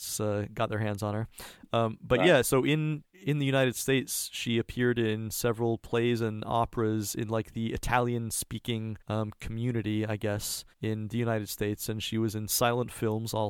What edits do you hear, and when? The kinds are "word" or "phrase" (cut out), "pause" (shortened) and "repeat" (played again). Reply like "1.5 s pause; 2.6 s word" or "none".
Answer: 3.1 s pause; 9.0 s pause; 10.7 s pause